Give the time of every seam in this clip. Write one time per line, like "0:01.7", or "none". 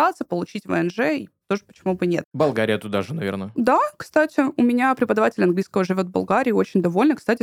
none

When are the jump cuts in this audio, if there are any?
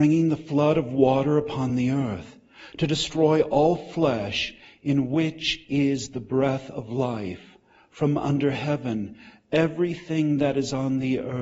none

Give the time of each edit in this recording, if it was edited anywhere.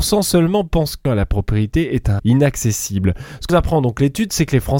0:01.1
0:02.2
0:03.5

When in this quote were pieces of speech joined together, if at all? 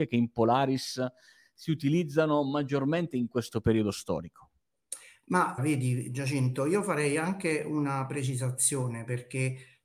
0:05.6

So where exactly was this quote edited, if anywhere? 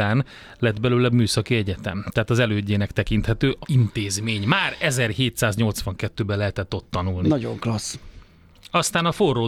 0:01.1
0:03.6

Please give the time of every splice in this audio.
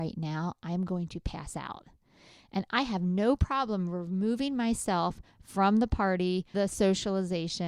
0:06.5

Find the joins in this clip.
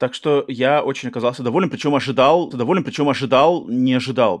0:02.5

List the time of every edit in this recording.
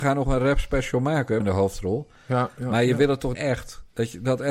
0:01.4
0:03.3

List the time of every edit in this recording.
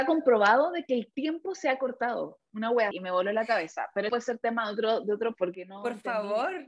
0:02.9
0:04.1
0:05.3

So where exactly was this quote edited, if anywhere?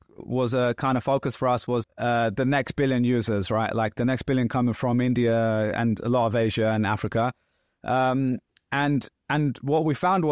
0:01.8

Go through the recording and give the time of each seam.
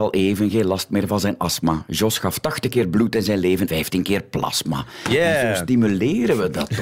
0:03.7

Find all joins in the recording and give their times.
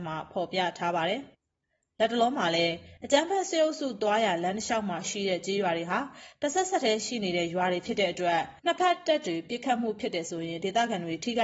0:01.3
0:08.6

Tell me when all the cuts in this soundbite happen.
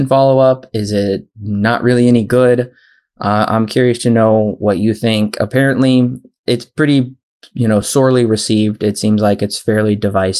none

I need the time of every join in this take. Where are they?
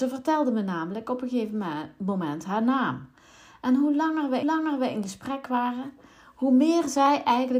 0:04.4

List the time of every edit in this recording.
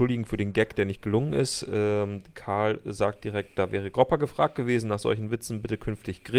none

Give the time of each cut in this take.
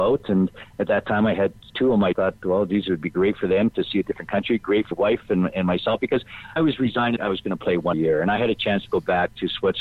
0:01.7
0:02.1
0:04.9
0:06.6
0:07.2
0:07.9

